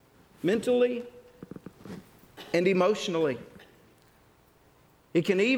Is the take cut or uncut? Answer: uncut